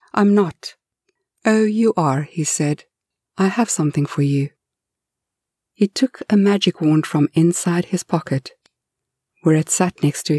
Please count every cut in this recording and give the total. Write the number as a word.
zero